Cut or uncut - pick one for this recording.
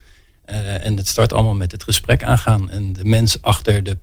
uncut